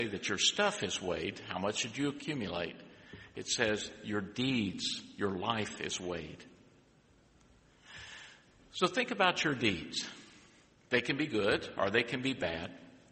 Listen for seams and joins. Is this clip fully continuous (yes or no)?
yes